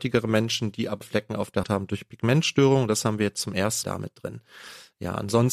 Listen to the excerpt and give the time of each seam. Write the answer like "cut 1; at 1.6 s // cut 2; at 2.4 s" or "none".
cut 1; at 1.0 s // cut 2; at 1.6 s // cut 3; at 3.8 s